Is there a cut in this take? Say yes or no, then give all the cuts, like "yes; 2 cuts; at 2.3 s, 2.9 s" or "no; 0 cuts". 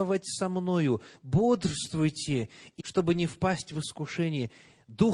yes; 1 cut; at 2.8 s